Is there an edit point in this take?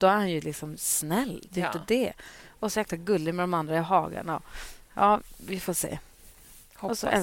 no; 0 cuts

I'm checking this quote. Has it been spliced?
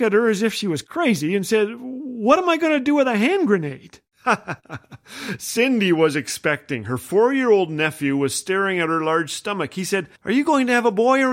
yes; 1 cut; at 10.2 s

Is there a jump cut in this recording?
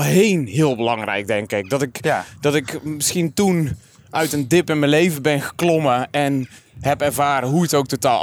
no; 0 cuts

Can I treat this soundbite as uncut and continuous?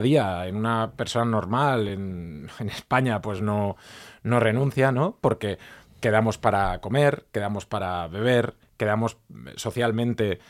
yes; 0 cuts

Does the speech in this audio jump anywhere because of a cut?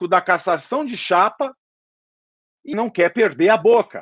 yes; 1 cut; at 2.7 s

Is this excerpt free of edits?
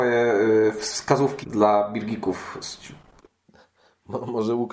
no; 1 cut; at 1.4 s

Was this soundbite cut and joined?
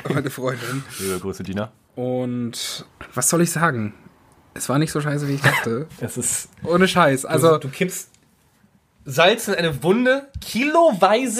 no; 0 cuts

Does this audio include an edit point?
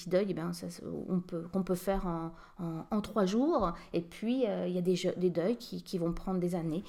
no; 0 cuts

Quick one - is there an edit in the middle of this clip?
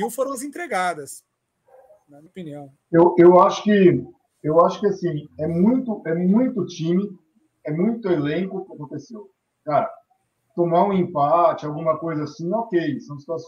yes; 2 cuts; at 2.3 s, 8.7 s

